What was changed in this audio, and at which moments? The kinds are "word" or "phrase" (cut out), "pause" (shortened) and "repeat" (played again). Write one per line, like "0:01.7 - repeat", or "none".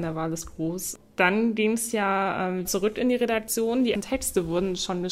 0:02.6 - word
0:03.9 - word